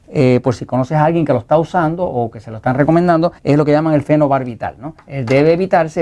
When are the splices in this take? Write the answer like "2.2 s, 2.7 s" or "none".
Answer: 3.4 s, 5.0 s